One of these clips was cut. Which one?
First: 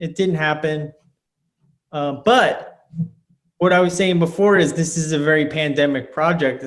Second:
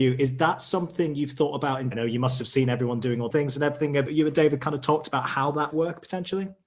second; 4 cuts; at 1.9 s, 3.3 s, 4.1 s, 5.7 s

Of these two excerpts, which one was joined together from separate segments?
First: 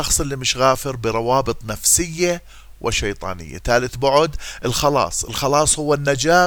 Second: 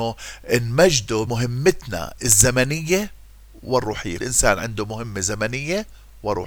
second; 2 cuts; at 1.3 s, 4.2 s

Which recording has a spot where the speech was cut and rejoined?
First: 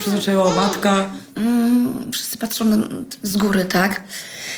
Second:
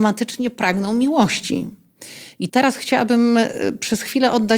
second; 1 cut; at 2.5 s

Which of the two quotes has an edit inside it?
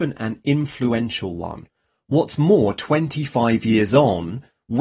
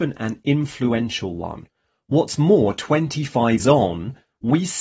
second; 1 cut; at 3.6 s

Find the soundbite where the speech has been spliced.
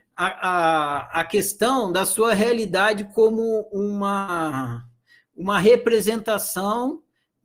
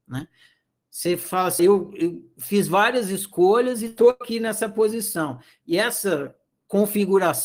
second; 1 cut; at 1.6 s

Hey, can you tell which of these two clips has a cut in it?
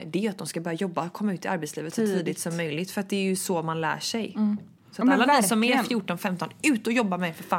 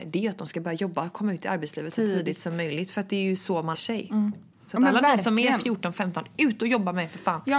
second; 1 cut; at 3.7 s

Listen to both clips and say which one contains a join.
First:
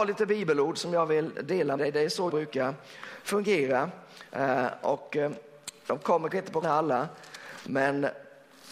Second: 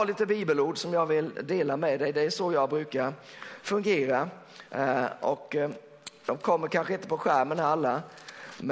first; 4 cuts; at 1.8 s, 2.3 s, 6.3 s, 6.6 s

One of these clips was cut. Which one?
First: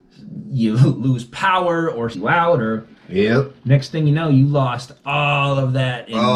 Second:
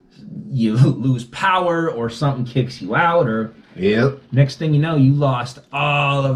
first; 1 cut; at 2.1 s

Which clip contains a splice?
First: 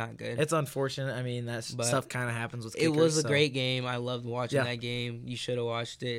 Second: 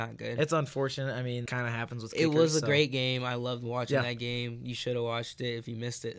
second; 1 cut; at 1.5 s

